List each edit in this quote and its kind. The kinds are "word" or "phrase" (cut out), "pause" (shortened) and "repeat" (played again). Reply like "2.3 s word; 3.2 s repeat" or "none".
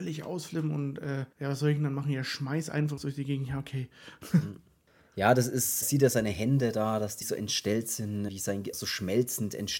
1.3 s pause; 3.0 s word; 5.8 s word; 7.2 s word; 8.3 s word; 8.7 s word